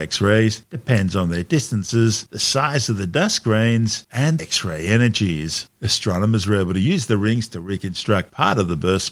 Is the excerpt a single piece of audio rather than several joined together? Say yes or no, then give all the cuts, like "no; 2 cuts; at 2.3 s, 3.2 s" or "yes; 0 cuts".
no; 2 cuts; at 4.4 s, 5.7 s